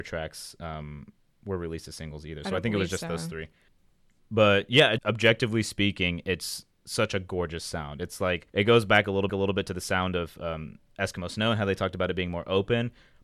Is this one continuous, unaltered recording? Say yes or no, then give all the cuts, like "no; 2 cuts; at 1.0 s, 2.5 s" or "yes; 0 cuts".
no; 3 cuts; at 5.0 s, 8.5 s, 9.3 s